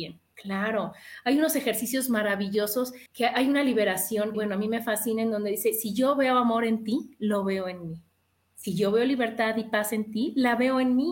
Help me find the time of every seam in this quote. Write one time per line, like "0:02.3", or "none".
0:03.1
0:04.3

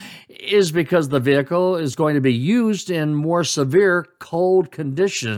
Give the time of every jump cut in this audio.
none

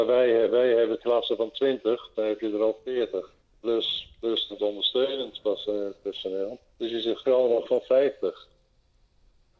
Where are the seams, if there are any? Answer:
0:01.0
0:02.1
0:03.4
0:04.5
0:06.7
0:07.6

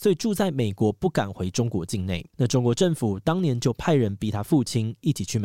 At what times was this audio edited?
0:02.3

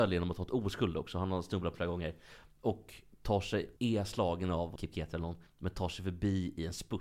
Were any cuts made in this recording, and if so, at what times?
0:01.7
0:03.8
0:04.8
0:05.5

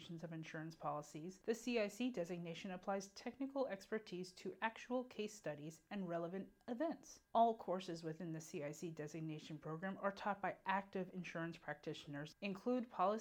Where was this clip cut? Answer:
0:01.4
0:07.2

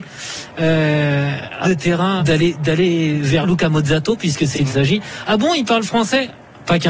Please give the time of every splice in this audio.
0:01.6
0:02.2
0:03.4
0:04.5

